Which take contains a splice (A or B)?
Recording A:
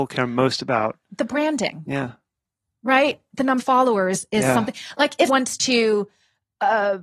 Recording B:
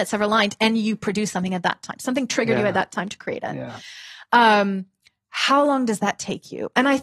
A